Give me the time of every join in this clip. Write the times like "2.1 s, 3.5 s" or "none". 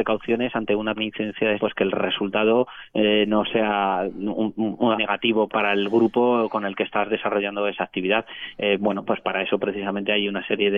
1.0 s, 1.6 s, 4.9 s, 5.5 s

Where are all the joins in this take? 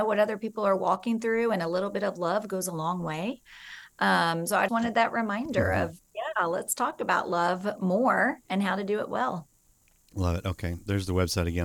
4.7 s

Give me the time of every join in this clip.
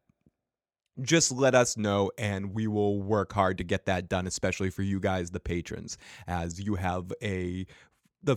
none

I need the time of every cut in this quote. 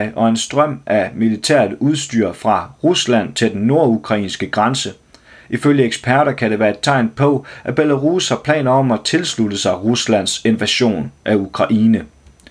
none

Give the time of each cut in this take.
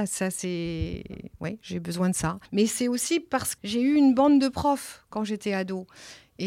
2.5 s, 3.6 s

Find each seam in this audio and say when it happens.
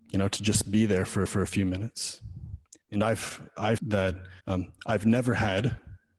1.3 s, 2.8 s, 3.8 s, 4.4 s

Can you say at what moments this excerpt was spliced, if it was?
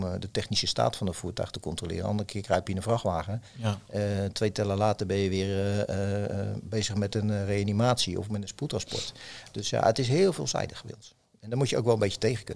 none

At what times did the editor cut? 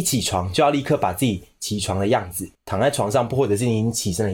2.5 s

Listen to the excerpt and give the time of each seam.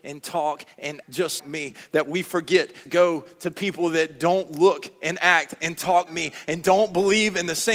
1.0 s, 1.4 s, 2.9 s, 6.1 s

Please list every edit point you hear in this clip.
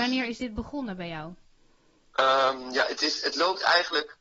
none

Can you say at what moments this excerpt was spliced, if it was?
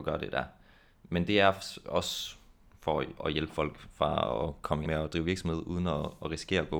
4.8 s

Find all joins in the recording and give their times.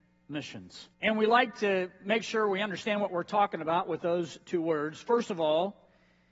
0.9 s

